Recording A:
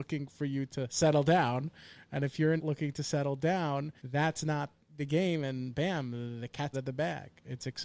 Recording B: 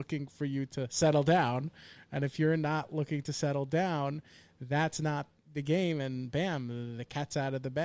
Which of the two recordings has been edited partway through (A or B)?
A